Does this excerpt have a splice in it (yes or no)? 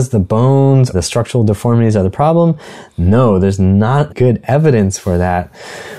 yes